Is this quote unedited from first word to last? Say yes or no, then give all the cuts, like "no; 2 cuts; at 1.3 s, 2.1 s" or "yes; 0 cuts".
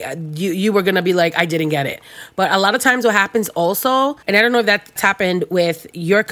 no; 2 cuts; at 4.2 s, 5.0 s